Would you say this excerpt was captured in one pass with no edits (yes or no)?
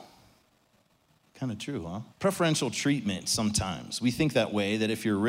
no